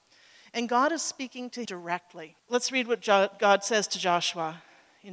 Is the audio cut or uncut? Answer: cut